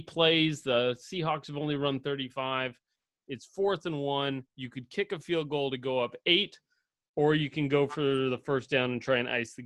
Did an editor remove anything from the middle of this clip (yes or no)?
yes